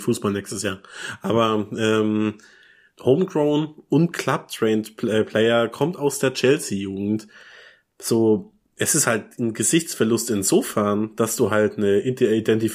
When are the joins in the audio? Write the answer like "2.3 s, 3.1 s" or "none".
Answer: none

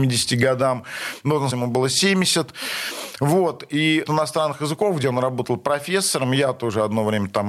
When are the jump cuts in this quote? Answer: 1.5 s, 4.1 s

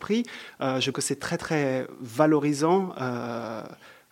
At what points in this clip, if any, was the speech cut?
0.9 s

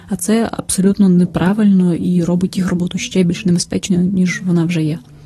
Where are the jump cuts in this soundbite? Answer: none

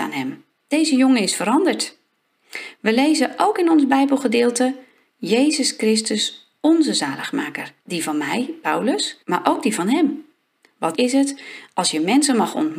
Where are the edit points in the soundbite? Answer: 7.8 s, 9.2 s, 10.9 s

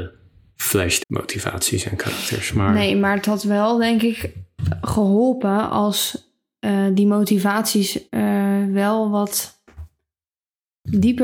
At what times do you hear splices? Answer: 1.0 s, 8.1 s

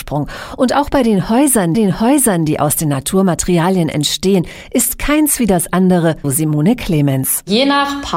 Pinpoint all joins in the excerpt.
1.7 s, 6.2 s

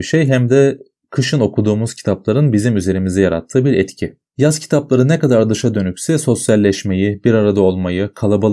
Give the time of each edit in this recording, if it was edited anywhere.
4.3 s

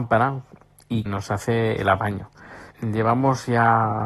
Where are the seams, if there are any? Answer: 1.1 s, 2.7 s

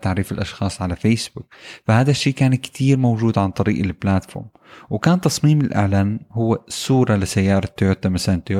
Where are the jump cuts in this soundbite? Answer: none

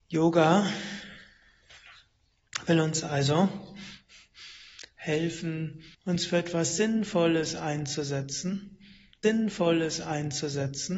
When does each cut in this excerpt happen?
5.9 s, 9.2 s

